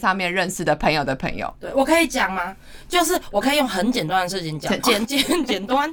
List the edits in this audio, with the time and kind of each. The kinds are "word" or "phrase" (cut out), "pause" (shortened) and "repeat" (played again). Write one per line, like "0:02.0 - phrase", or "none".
0:04.8 - phrase